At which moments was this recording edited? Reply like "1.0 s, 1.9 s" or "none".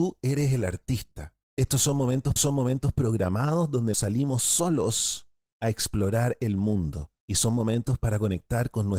1.4 s, 2.4 s, 3.9 s, 7.2 s